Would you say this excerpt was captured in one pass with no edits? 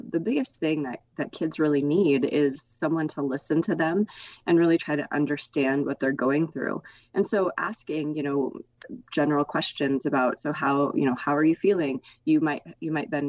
yes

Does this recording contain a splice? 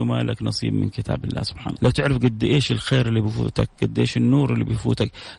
yes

